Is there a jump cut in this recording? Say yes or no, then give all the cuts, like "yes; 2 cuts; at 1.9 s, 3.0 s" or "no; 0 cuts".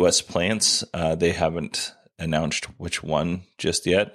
no; 0 cuts